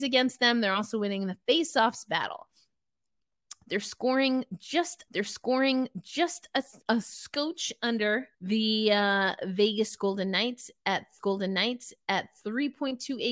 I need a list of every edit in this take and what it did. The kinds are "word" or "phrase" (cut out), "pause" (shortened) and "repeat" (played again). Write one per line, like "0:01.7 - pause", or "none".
0:05.1 - repeat
0:08.3 - pause
0:11.2 - repeat